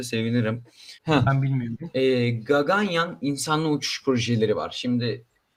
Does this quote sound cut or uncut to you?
cut